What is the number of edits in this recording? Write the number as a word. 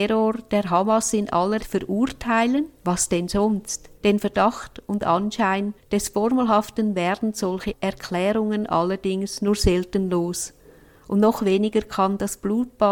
three